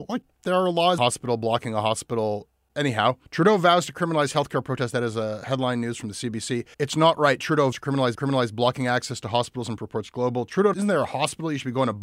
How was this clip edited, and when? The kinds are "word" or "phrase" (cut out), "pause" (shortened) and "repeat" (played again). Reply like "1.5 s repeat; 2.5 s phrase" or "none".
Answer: 1.0 s phrase; 3.3 s pause; 6.7 s pause; 7.7 s word; 8.1 s repeat; 9.8 s word; 10.7 s phrase

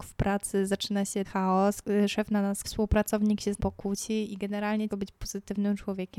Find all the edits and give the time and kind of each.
1.2 s word; 2.6 s word; 3.6 s word; 4.9 s word

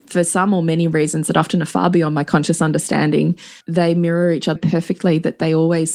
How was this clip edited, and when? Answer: 3.6 s pause; 4.6 s word

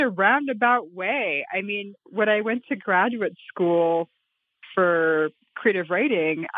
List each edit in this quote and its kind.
2.0 s pause

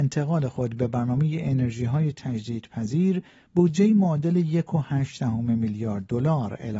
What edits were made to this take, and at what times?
none

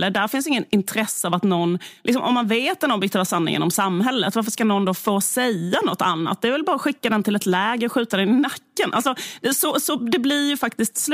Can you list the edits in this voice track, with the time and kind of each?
none

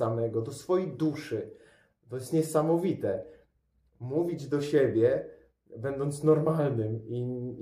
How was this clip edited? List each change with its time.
none

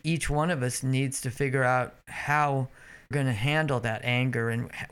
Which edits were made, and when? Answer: 3.1 s word

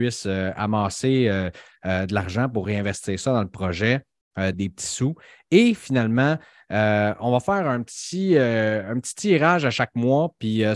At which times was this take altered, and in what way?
4.5 s word

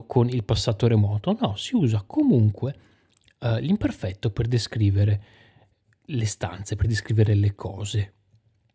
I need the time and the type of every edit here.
none

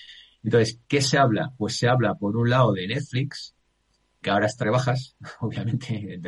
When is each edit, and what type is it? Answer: 4.2 s word; 4.6 s word

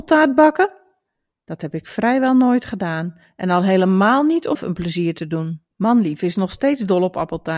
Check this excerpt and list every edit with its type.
4.5 s word; 5.7 s pause

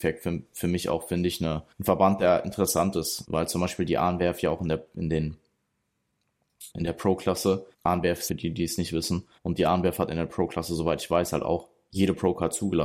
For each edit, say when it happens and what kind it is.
1.7 s pause; 3.2 s word; 6.7 s word; 7.7 s pause; 8.3 s phrase; 9.4 s pause

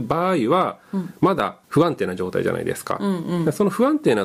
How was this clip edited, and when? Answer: 1.6 s pause

